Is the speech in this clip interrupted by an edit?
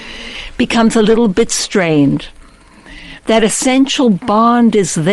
no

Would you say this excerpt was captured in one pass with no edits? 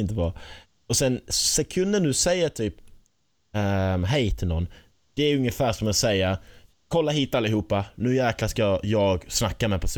yes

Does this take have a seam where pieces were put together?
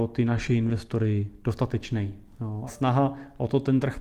yes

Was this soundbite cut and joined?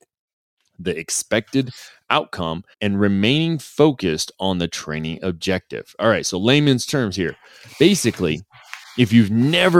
yes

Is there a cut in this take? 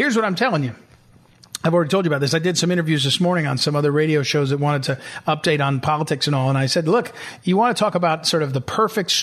no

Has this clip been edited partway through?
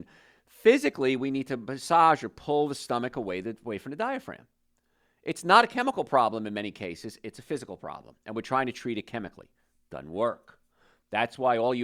no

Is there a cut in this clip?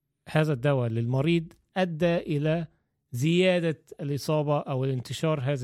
no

